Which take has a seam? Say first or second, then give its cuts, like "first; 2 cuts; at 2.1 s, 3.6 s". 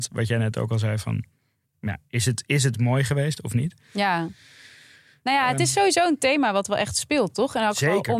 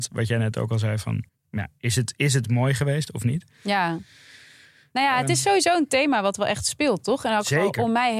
second; 1 cut; at 1.3 s